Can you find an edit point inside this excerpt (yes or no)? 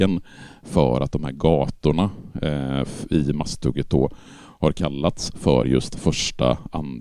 no